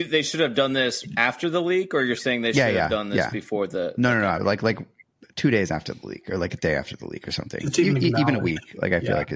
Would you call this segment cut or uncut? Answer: uncut